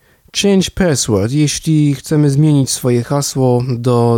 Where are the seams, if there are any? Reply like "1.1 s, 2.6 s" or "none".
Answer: none